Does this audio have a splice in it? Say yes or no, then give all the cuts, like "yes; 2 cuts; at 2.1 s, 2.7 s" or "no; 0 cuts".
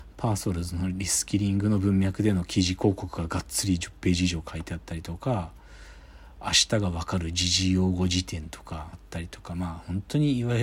yes; 1 cut; at 8.9 s